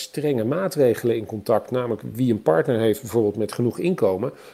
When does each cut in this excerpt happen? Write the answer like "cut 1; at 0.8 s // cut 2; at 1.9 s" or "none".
none

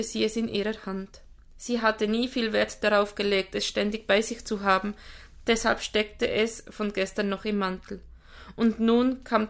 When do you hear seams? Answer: none

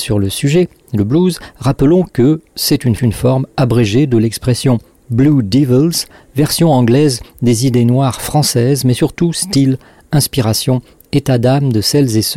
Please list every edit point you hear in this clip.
cut 1; at 3.0 s

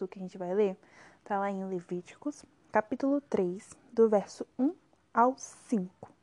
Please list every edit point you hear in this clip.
none

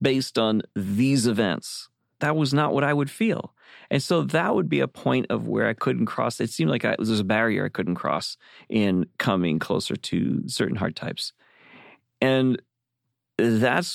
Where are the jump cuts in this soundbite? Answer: none

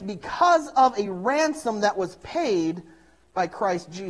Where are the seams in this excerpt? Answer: none

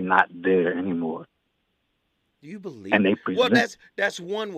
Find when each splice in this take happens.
none

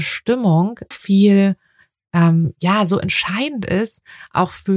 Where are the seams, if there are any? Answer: cut 1; at 0.9 s

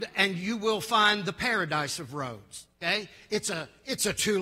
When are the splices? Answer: cut 1; at 2.7 s

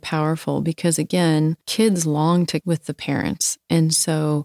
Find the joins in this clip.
cut 1; at 1.6 s // cut 2; at 2.6 s

